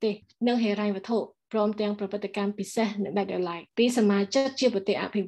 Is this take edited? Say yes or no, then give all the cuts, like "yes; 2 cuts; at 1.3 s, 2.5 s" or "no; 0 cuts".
yes; 1 cut; at 3.7 s